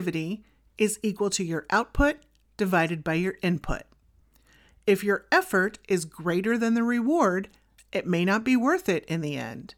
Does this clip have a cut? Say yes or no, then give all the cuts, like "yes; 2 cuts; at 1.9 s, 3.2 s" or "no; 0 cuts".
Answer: no; 0 cuts